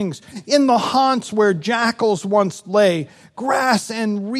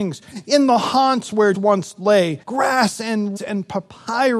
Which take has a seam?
second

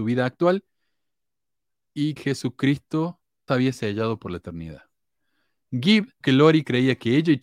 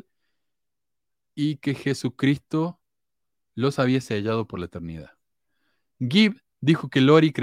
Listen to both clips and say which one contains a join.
first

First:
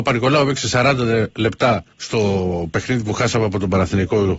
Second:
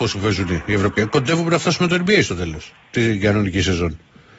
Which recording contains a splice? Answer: first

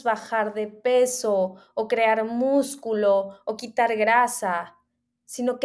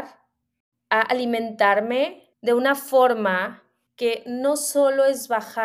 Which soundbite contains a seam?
second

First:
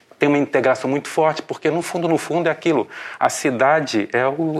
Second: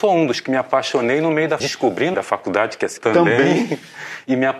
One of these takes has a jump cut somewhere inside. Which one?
second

